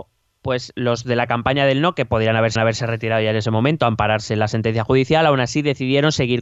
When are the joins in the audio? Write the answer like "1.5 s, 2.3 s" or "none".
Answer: 2.6 s